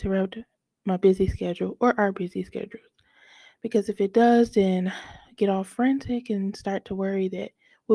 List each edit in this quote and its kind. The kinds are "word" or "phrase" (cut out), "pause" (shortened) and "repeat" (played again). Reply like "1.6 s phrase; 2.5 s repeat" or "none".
none